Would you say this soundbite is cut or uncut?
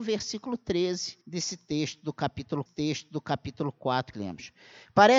cut